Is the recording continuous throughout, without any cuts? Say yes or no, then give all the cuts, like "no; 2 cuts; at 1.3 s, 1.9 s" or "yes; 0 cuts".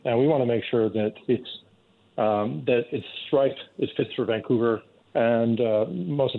yes; 0 cuts